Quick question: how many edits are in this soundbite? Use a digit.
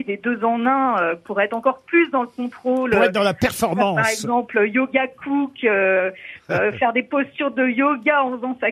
0